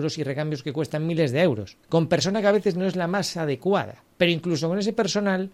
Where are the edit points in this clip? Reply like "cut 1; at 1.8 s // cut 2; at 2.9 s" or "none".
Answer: cut 1; at 1.8 s // cut 2; at 4.1 s